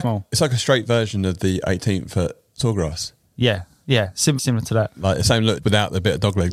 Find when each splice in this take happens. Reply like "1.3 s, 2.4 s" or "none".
4.4 s, 5.6 s